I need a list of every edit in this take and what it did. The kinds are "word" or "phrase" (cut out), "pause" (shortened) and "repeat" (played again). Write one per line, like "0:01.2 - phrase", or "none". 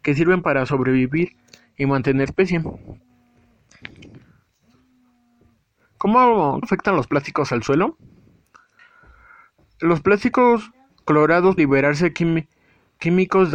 0:02.3 - word
0:06.6 - word
0:11.6 - word